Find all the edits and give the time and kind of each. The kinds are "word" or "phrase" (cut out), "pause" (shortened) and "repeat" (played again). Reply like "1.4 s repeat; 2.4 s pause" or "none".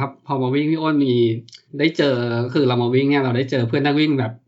1.7 s pause